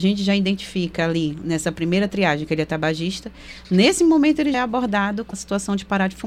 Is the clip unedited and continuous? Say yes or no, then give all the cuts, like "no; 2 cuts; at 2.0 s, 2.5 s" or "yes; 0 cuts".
no; 2 cuts; at 4.5 s, 5.3 s